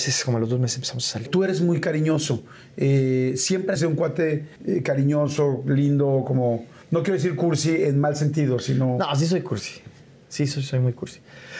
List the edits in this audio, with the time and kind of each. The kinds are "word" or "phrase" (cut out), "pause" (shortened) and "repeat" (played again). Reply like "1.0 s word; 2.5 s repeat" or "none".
3.8 s phrase; 4.6 s pause